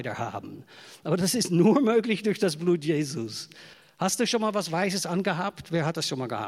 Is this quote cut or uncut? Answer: cut